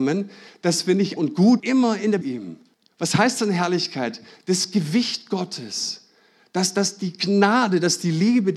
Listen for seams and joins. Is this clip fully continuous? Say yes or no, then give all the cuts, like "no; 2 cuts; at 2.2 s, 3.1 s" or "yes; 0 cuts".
no; 4 cuts; at 1.2 s, 1.6 s, 2.2 s, 2.7 s